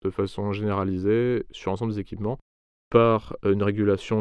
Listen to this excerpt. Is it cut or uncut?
uncut